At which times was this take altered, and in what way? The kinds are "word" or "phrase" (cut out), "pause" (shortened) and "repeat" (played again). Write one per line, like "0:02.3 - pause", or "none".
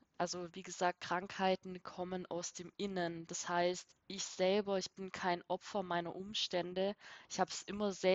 none